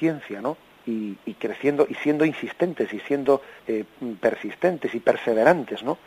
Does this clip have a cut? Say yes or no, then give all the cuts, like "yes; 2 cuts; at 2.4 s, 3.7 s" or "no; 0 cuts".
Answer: yes; 2 cuts; at 1.2 s, 3.6 s